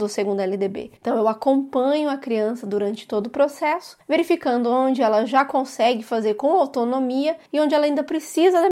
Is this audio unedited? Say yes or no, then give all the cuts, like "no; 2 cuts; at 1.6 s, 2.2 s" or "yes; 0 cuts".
no; 2 cuts; at 1.0 s, 7.5 s